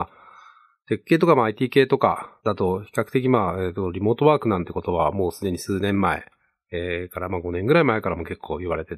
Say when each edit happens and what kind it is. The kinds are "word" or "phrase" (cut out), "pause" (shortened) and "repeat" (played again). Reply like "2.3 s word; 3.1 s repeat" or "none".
2.4 s pause